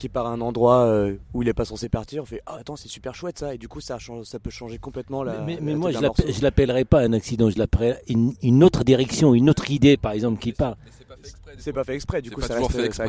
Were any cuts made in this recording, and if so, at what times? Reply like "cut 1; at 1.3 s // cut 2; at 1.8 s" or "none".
cut 1; at 2.6 s